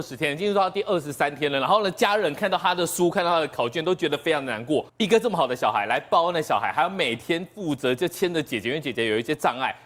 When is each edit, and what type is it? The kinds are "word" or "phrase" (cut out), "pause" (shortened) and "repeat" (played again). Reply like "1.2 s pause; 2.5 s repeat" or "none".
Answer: 4.9 s pause